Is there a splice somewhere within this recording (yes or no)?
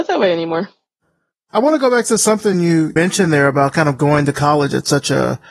no